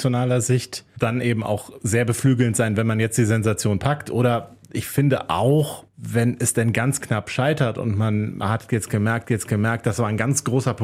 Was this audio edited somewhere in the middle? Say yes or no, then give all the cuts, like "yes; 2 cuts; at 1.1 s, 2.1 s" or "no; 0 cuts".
yes; 2 cuts; at 5.9 s, 9.2 s